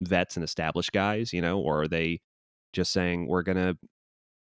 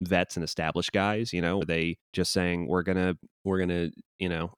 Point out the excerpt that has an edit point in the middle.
second; 3 cuts; at 1.6 s, 2.0 s, 3.3 s

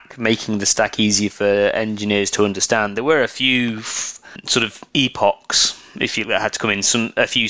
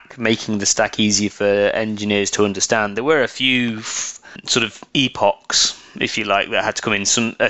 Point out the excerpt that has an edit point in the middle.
first; 1 cut; at 6.2 s

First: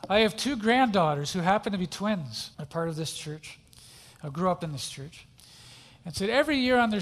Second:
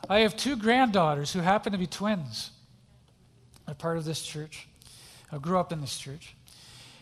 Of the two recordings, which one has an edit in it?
first; 1 cut; at 2.5 s

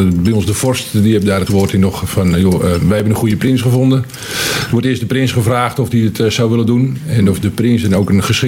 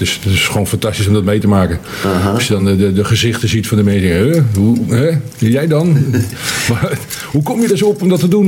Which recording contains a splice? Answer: first; 1 cut; at 1.5 s

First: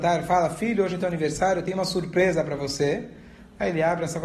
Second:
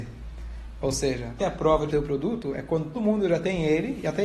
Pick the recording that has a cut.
second; 3 cuts; at 1.4 s, 1.9 s, 2.9 s

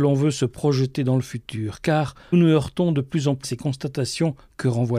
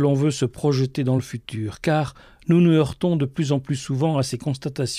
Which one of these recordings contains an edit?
first; 2 cuts; at 2.3 s, 3.4 s

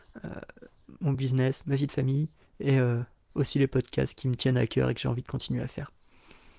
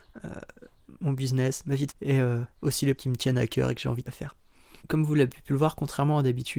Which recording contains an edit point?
second; 5 cuts; at 1.9 s, 2.5 s, 3.0 s, 4.1 s, 4.8 s

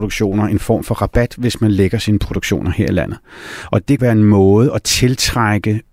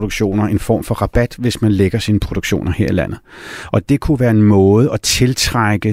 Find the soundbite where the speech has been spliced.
first; 1 cut; at 4.0 s

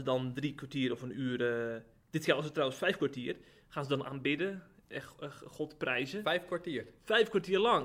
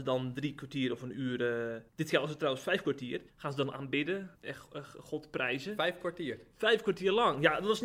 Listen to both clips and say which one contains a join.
second; 3 cuts; at 1.9 s, 3.3 s, 4.3 s

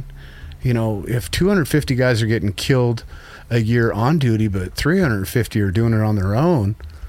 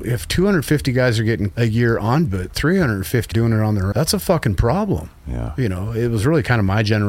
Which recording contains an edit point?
second; 4 cuts; at 1.5 s, 2.3 s, 3.3 s, 3.9 s

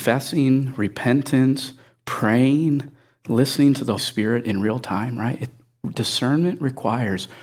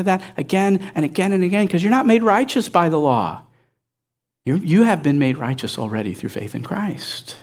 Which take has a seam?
first; 1 cut; at 4.0 s

